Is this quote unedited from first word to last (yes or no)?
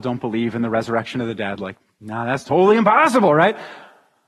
yes